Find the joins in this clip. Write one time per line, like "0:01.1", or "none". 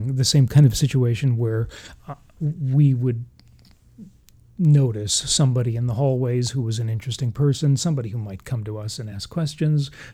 none

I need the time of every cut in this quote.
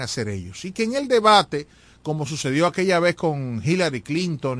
none

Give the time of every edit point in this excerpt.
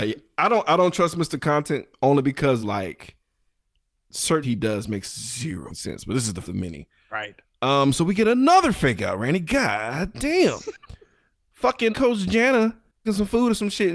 0:02.6
0:04.4
0:05.7
0:06.4
0:11.9
0:13.0

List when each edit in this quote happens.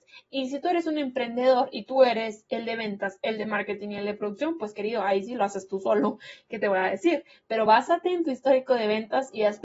none

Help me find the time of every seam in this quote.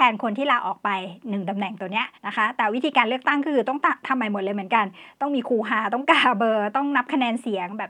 0:02.2

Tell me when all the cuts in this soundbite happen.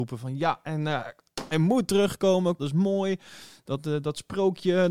0:01.5
0:02.6

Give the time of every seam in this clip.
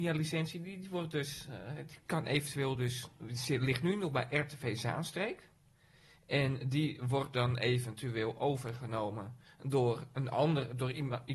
none

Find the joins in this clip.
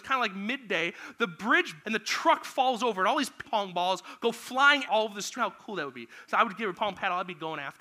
0:01.8
0:03.4
0:04.9
0:05.4
0:06.8

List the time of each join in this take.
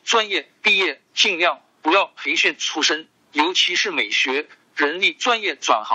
none

